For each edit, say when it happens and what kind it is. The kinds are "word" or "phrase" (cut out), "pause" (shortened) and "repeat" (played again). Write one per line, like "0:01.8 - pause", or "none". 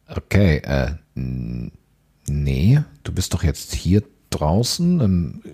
0:01.0 - pause